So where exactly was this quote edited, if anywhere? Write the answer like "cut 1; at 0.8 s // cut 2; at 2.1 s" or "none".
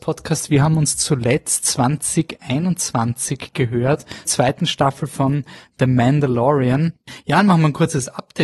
cut 1; at 4.3 s